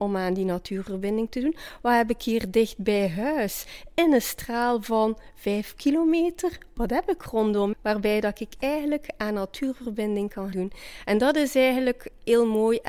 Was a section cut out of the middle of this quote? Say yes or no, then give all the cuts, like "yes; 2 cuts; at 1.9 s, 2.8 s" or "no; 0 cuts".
yes; 2 cuts; at 7.7 s, 10.5 s